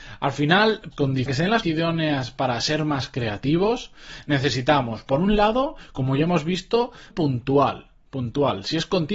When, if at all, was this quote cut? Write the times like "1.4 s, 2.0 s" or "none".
0.9 s, 1.3 s, 1.6 s, 7.1 s